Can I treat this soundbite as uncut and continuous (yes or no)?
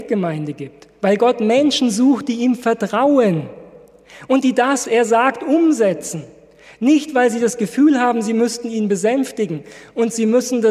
no